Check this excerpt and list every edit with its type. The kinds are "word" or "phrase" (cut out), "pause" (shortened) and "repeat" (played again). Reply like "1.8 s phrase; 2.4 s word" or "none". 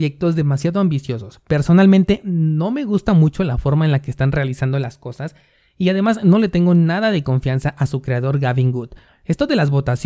none